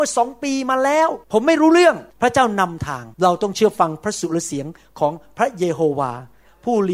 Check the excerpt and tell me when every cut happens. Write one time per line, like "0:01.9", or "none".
0:01.2
0:02.1
0:03.1